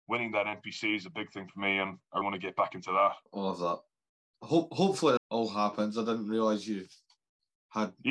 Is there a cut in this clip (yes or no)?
yes